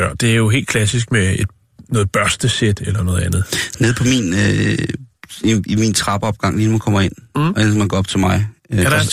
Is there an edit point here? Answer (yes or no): no